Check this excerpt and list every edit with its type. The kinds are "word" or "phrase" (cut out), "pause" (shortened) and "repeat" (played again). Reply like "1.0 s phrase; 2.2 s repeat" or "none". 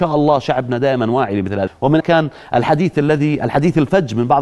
1.7 s word; 2.0 s word